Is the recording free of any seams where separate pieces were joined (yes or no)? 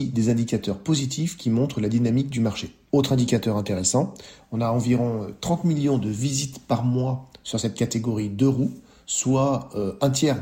yes